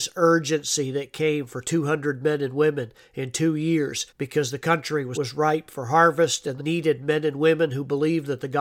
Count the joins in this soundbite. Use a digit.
3